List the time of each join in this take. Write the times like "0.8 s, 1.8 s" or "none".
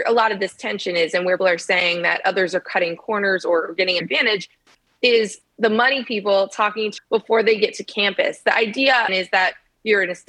1.4 s, 4.0 s, 7.0 s, 9.1 s